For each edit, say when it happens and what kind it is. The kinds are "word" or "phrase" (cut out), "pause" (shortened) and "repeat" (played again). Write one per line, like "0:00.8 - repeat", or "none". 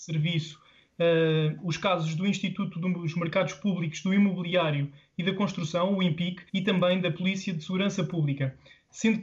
0:06.5 - pause